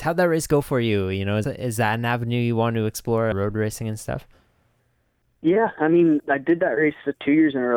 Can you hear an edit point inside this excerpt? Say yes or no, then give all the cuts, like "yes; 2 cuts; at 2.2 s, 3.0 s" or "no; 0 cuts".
yes; 3 cuts; at 1.4 s, 3.3 s, 6.2 s